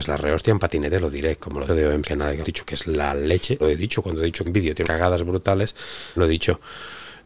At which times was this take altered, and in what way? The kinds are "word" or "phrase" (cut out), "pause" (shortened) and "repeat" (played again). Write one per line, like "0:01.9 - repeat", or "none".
0:01.7 - word
0:02.0 - word
0:02.4 - phrase
0:03.6 - word
0:04.4 - phrase
0:04.8 - word
0:06.2 - word